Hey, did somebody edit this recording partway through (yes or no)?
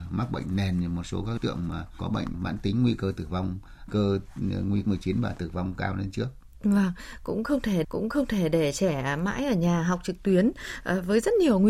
yes